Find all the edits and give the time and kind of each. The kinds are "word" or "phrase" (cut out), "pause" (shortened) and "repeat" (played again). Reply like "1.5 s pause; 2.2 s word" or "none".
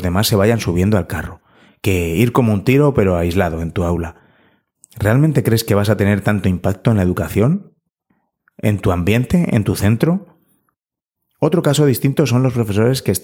none